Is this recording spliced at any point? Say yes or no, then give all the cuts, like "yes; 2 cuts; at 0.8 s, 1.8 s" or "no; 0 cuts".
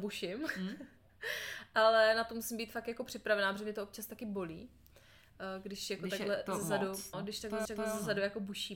yes; 2 cuts; at 7.1 s, 7.7 s